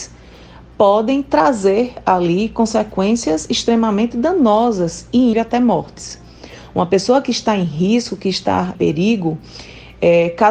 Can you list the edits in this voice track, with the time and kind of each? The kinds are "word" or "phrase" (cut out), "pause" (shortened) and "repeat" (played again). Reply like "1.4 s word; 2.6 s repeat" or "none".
5.3 s word; 8.7 s word